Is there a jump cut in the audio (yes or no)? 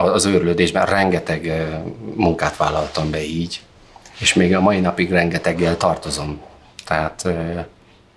no